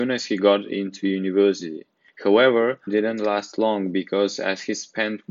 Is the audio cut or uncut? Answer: cut